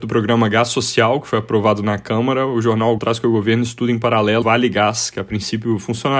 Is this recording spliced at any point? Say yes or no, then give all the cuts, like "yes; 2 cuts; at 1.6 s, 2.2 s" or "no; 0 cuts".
yes; 2 cuts; at 3.0 s, 4.4 s